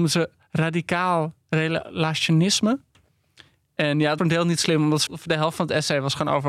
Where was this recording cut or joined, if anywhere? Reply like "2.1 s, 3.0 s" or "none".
4.2 s, 5.1 s